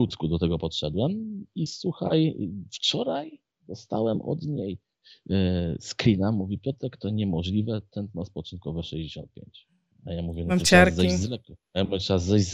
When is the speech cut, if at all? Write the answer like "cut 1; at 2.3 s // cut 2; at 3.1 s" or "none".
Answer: none

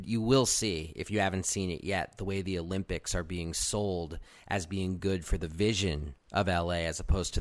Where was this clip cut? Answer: none

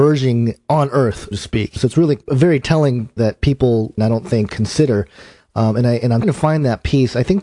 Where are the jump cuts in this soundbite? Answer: cut 1; at 1.3 s // cut 2; at 1.8 s // cut 3; at 3.2 s // cut 4; at 4.0 s // cut 5; at 4.5 s // cut 6; at 6.2 s

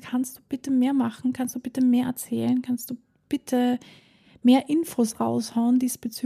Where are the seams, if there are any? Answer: none

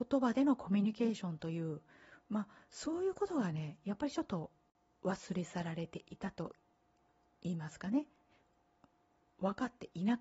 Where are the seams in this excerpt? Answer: none

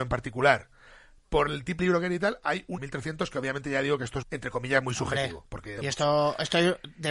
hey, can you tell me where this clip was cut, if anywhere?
cut 1; at 1.8 s // cut 2; at 2.8 s // cut 3; at 4.2 s // cut 4; at 5.8 s

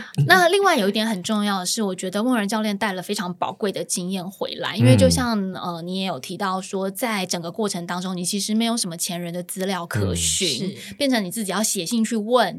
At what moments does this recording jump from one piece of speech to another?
none

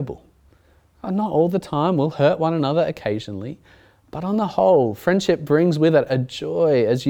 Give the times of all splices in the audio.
none

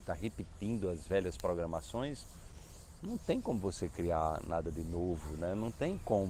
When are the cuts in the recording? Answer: none

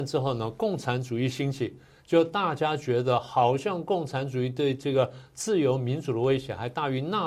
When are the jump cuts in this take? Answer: none

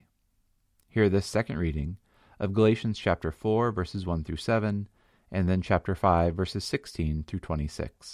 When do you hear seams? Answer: none

